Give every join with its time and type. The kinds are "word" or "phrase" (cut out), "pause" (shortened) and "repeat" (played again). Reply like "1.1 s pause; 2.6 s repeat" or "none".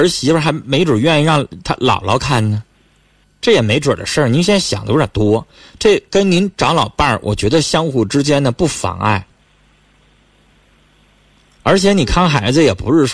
none